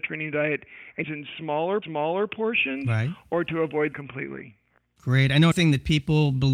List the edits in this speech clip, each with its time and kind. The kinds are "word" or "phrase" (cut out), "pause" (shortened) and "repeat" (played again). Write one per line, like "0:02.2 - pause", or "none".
0:01.0 - phrase
0:01.8 - repeat
0:03.9 - word
0:05.5 - word